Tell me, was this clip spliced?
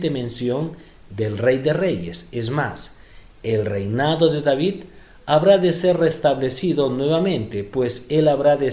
no; 0 cuts

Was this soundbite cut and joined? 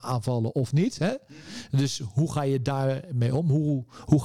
no; 0 cuts

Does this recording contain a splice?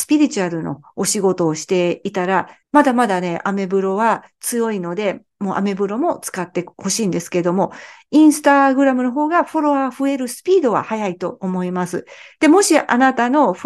yes; 1 cut; at 2.6 s

